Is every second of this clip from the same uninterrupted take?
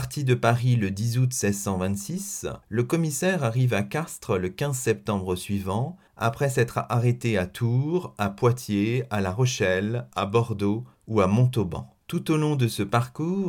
no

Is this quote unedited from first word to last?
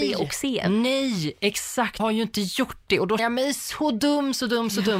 no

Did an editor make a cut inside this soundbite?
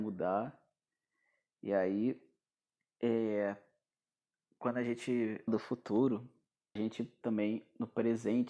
yes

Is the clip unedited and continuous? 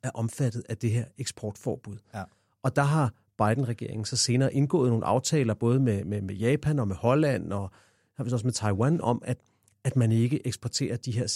yes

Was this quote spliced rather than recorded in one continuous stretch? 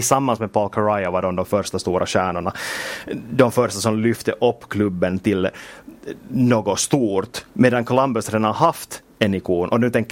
yes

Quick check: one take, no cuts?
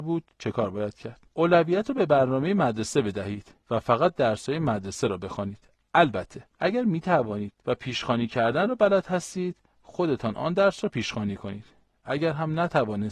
yes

